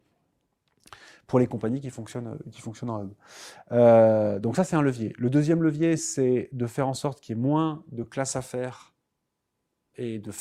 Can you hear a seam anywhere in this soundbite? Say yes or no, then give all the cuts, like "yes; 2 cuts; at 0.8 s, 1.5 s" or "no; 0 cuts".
no; 0 cuts